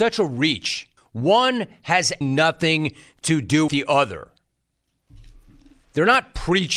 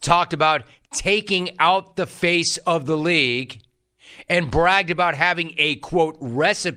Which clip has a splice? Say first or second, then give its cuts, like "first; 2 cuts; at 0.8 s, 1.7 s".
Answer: first; 3 cuts; at 1.0 s, 2.2 s, 3.7 s